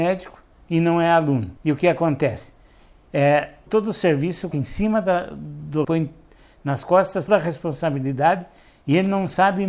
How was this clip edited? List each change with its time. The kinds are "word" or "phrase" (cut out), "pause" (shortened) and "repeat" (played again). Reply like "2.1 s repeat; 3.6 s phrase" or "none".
1.6 s pause; 3.7 s word; 4.5 s word; 5.8 s word; 6.8 s word; 7.3 s word